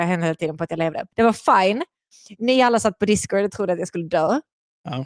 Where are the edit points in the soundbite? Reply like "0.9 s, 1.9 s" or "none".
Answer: 1.1 s